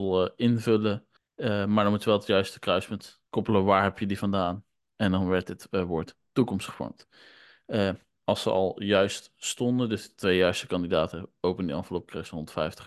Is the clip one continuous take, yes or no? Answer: no